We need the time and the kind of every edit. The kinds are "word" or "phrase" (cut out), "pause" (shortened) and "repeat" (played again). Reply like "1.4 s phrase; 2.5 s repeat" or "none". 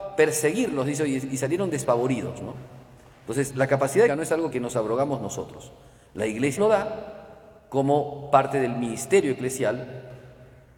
4.1 s word; 4.5 s word; 6.6 s word